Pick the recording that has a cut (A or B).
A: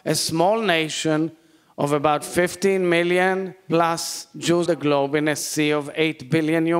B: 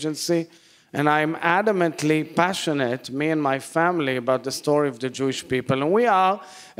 A